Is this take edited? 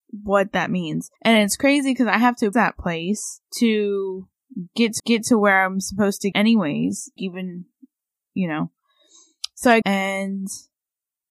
yes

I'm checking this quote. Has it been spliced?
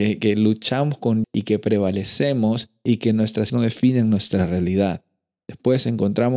yes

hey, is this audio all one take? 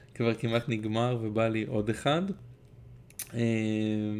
yes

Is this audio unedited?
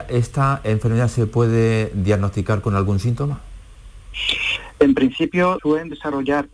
no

